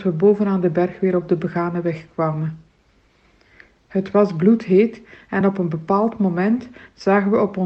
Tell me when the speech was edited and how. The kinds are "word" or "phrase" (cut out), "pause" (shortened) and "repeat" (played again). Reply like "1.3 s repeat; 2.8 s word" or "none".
none